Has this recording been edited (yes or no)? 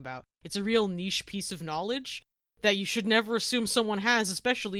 no